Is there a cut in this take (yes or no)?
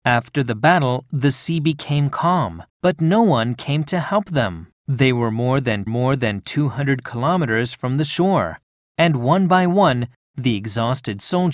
yes